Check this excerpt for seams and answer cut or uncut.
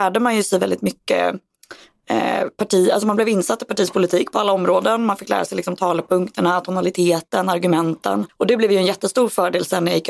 cut